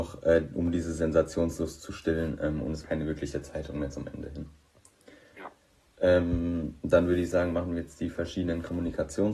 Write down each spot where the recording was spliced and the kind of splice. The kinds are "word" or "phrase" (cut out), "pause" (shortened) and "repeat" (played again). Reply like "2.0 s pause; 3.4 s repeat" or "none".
2.8 s word